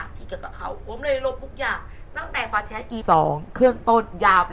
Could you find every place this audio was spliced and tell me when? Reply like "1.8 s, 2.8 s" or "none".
3.0 s